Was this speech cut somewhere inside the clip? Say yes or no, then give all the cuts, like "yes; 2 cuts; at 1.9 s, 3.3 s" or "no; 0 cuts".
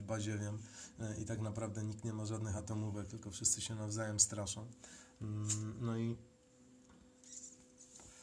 no; 0 cuts